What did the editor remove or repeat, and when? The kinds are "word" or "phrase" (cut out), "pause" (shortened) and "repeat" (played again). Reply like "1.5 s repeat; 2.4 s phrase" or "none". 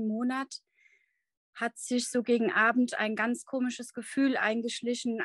none